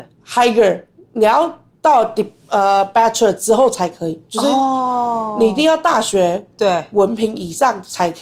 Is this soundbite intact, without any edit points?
yes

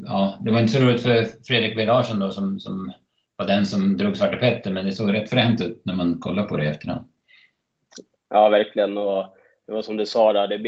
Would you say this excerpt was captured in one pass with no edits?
no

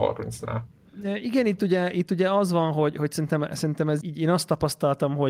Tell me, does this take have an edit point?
yes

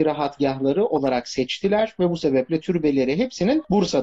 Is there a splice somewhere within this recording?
no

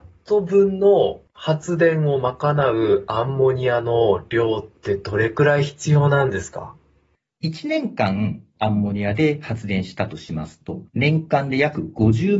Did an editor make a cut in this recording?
yes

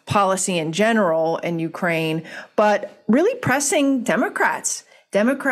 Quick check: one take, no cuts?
yes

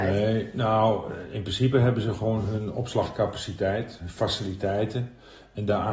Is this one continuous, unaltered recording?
yes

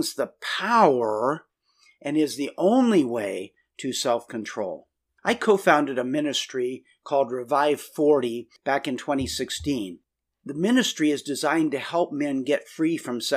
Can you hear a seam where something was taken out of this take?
no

